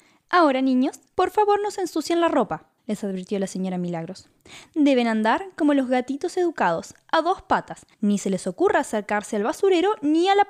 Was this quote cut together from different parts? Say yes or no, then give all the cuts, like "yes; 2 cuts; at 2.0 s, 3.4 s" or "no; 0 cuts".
yes; 3 cuts; at 1.1 s, 2.8 s, 7.9 s